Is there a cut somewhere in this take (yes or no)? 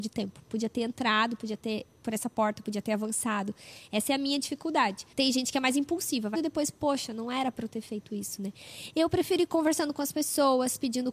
yes